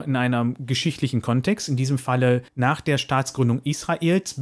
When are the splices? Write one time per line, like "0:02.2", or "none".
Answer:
0:02.5